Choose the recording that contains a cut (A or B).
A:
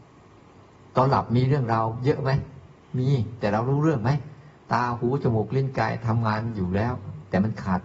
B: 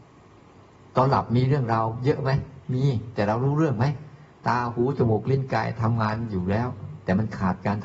B